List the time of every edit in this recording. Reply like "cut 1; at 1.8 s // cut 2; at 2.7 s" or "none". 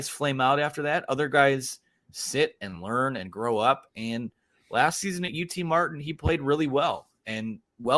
none